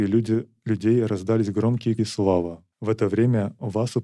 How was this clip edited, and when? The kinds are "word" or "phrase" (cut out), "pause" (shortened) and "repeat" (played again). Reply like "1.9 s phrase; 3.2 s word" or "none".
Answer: 2.0 s word; 2.7 s pause